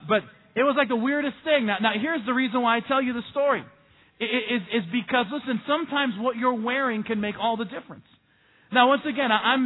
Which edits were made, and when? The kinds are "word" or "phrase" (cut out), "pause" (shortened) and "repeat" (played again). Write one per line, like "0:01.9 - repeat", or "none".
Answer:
none